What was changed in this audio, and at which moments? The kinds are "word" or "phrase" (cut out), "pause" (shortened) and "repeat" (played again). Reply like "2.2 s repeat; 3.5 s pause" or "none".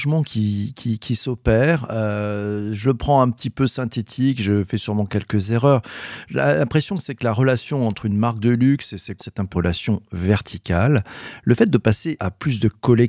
9.2 s word; 9.5 s word; 12.2 s word

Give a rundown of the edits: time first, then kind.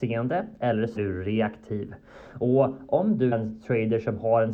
1.0 s word; 3.3 s word

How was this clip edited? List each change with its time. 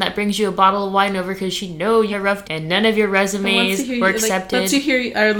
2.1 s word; 2.4 s word

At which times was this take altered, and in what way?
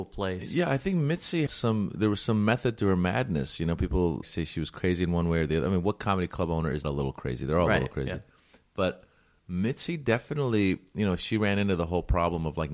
1.5 s word; 4.2 s word; 6.8 s word

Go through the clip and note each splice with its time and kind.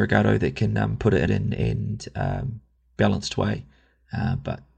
1.3 s phrase

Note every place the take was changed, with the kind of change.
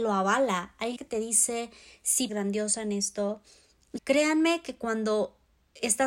1.0 s word; 2.3 s phrase; 4.0 s word

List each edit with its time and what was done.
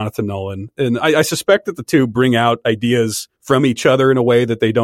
3.3 s pause

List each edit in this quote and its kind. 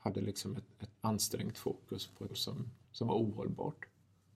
0.9 s pause; 2.3 s word; 2.8 s pause

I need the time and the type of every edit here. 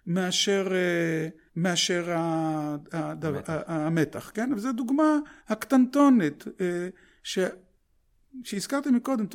1.5 s pause; 5.4 s pause

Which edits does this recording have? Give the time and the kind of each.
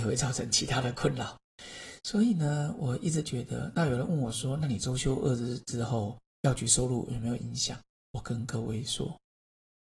7.9 s pause

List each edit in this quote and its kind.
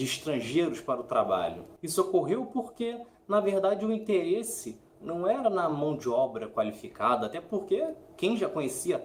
none

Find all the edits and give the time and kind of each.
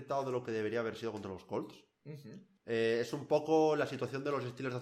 2.6 s pause

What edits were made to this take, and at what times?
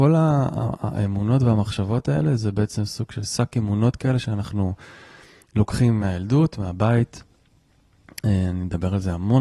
none

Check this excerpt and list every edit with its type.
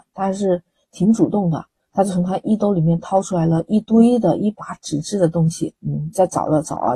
5.8 s pause

